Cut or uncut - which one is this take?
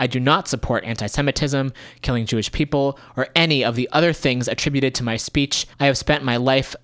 cut